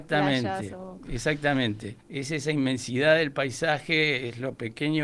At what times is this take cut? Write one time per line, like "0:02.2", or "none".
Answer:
0:02.0